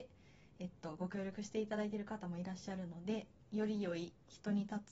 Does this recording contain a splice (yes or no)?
no